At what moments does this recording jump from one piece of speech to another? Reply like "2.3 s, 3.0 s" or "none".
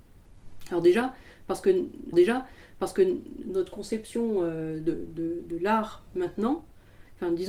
2.1 s

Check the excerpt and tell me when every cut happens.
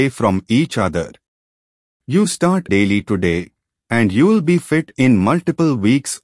2.7 s

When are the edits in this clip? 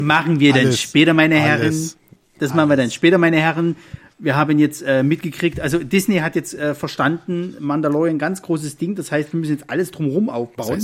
none

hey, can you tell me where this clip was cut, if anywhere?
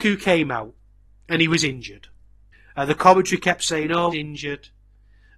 1.1 s, 2.5 s, 4.1 s

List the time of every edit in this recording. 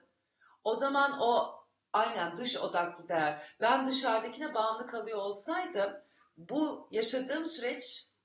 none

